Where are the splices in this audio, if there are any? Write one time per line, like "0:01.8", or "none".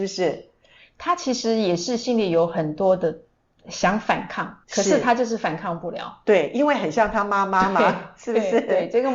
0:04.6